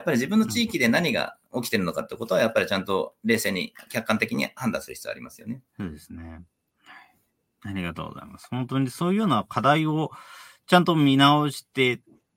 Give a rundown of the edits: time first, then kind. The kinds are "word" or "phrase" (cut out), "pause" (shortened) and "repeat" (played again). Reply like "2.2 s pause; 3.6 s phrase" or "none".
5.7 s pause